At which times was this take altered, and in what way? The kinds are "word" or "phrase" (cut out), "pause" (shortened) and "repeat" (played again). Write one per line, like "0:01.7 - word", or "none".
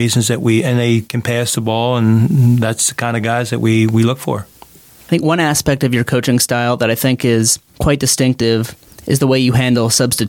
0:04.5 - pause
0:07.7 - pause